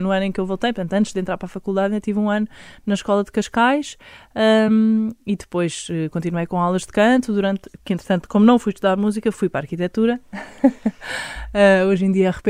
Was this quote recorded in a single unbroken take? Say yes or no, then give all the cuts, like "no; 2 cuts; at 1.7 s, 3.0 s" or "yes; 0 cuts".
yes; 0 cuts